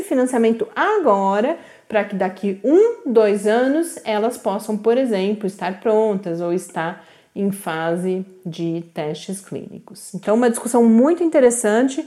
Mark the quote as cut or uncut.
uncut